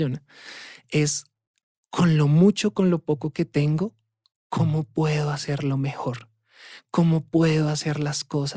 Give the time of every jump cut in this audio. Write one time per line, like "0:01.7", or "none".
none